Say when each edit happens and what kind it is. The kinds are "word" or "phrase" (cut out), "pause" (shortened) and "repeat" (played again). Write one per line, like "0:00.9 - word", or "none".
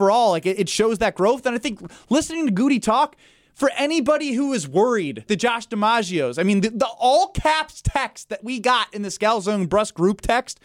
0:05.3 - word

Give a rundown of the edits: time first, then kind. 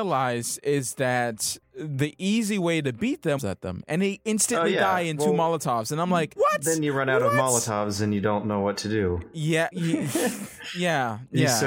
0:03.4 - phrase
0:06.4 - word
0:09.7 - word

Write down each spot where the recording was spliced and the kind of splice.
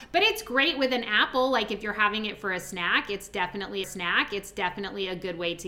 0:03.8 - repeat

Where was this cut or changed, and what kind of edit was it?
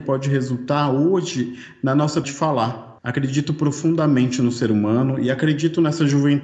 0:02.2 - word
0:03.0 - pause

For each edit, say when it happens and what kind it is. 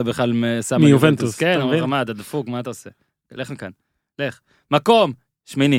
none

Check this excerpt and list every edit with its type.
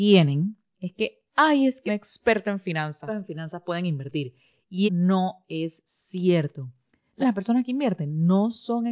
0:01.3 - pause
0:01.9 - phrase
0:03.1 - phrase
0:04.8 - word
0:07.2 - word

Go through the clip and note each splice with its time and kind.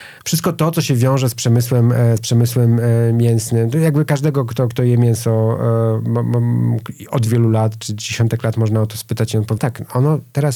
0:04.7 - word
0:07.3 - word
0:09.6 - word

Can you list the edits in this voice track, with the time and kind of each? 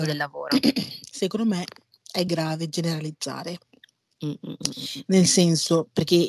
none

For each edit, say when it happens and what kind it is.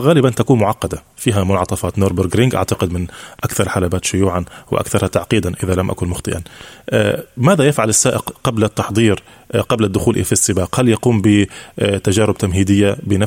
0:01.9 - word

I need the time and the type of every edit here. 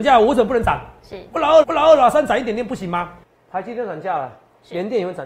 0:01.6 - repeat

